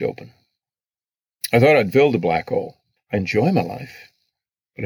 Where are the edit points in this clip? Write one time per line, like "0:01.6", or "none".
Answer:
0:03.0